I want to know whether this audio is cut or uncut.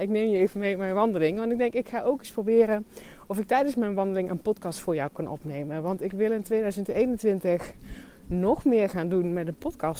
uncut